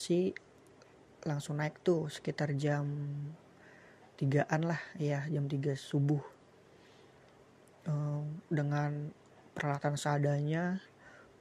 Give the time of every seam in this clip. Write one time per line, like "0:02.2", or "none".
none